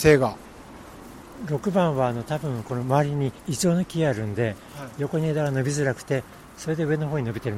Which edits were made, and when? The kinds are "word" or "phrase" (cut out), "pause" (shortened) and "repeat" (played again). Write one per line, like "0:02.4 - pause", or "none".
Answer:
0:03.4 - pause